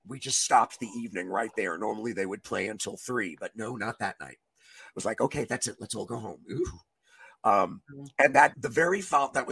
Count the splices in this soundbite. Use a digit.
1